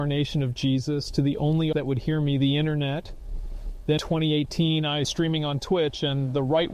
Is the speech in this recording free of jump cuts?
no; 3 cuts; at 1.7 s, 4.0 s, 5.0 s

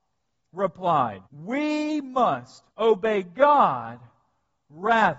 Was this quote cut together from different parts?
yes; 2 cuts; at 1.3 s, 2.7 s

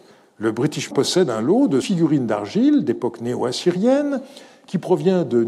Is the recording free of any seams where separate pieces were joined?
no; 2 cuts; at 0.9 s, 1.8 s

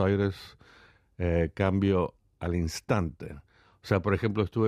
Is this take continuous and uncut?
yes; 0 cuts

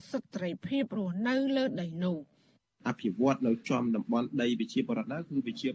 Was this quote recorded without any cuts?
yes; 0 cuts

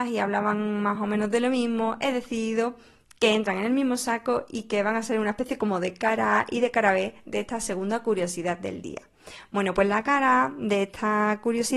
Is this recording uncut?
yes; 0 cuts

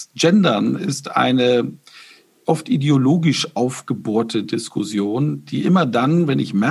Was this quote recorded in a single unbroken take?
yes; 0 cuts

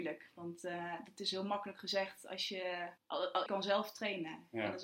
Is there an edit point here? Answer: yes; 2 cuts; at 3.0 s, 3.5 s

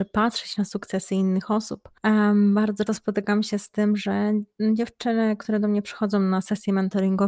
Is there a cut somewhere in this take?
yes; 1 cut; at 2.9 s

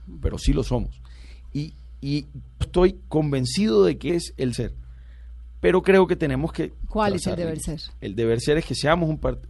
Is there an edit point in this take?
yes; 3 cuts; at 2.6 s, 4.1 s, 4.5 s

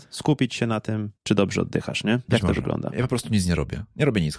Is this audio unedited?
no; 1 cut; at 1.2 s

